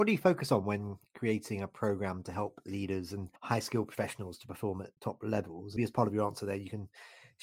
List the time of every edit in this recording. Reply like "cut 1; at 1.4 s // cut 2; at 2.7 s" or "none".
cut 1; at 3.4 s // cut 2; at 5.0 s // cut 3; at 5.8 s